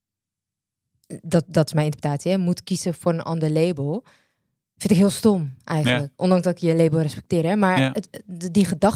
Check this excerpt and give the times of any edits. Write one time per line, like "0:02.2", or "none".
none